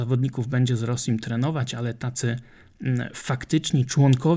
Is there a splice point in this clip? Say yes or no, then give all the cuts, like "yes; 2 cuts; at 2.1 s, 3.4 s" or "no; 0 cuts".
no; 0 cuts